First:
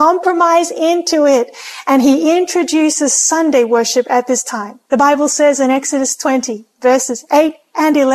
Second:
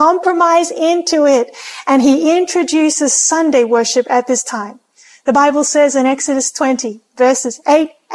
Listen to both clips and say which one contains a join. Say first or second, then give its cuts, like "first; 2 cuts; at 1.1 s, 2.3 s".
first; 1 cut; at 4.9 s